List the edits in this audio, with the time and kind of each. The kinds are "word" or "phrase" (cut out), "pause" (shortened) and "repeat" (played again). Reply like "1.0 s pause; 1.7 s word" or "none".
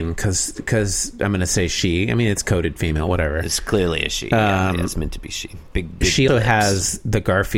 6.3 s word

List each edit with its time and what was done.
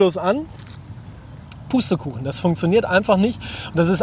none

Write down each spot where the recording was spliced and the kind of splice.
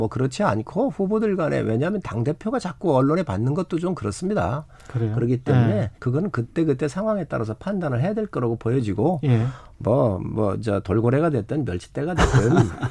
5.9 s pause

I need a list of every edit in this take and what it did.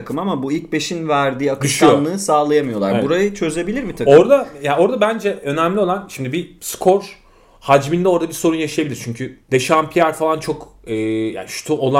9.4 s pause

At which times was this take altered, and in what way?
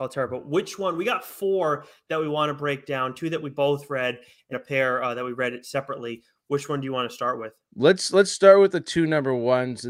4.5 s word

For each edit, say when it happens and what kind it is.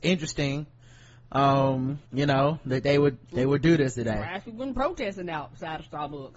2.1 s pause; 3.2 s pause

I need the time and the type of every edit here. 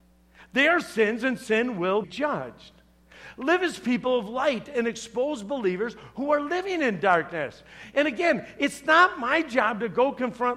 2.0 s word

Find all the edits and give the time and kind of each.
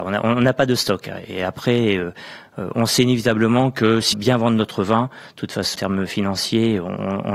4.1 s phrase; 5.7 s word

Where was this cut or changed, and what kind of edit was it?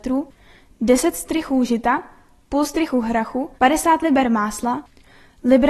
3.6 s pause

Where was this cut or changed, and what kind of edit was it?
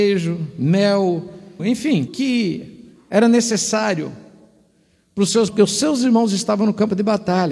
1.6 s word; 2.1 s word; 5.5 s word

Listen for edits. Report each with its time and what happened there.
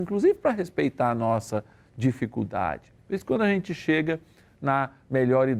3.0 s pause

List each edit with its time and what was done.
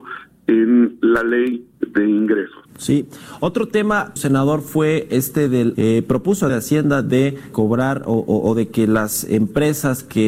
1.7 s pause; 2.7 s pause; 4.2 s word; 5.7 s phrase; 6.5 s phrase; 7.5 s word

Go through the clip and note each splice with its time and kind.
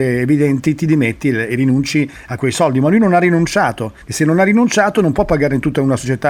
4.0 s pause

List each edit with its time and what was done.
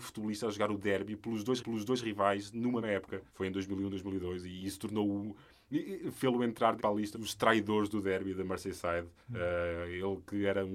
1.6 s repeat; 2.8 s word; 3.3 s pause; 6.8 s word; 7.1 s word; 9.2 s pause

